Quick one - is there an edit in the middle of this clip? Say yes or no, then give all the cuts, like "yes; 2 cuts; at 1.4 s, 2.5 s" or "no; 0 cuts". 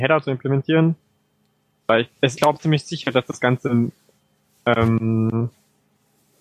yes; 1 cut; at 2.4 s